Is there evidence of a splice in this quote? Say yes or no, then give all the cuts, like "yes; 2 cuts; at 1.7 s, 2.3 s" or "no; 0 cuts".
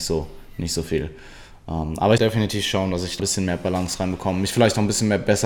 yes; 2 cuts; at 2.2 s, 3.2 s